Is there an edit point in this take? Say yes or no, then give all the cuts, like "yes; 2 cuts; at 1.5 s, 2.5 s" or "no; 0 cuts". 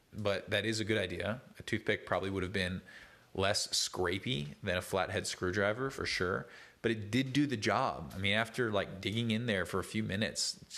no; 0 cuts